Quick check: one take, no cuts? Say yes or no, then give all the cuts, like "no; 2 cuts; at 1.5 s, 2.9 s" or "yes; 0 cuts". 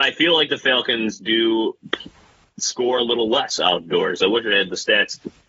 yes; 0 cuts